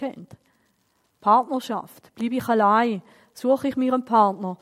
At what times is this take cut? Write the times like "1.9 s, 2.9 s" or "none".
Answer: none